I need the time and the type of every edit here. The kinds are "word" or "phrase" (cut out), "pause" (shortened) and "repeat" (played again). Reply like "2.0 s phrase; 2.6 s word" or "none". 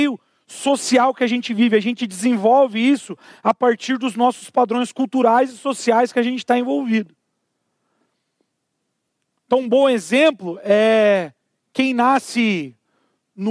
11.4 s pause